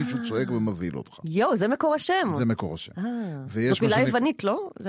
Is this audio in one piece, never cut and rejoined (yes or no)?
yes